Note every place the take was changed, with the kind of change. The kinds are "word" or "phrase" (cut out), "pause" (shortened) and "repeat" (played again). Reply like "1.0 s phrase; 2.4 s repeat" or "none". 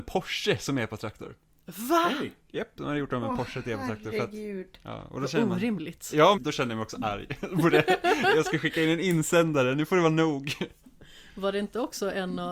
6.3 s word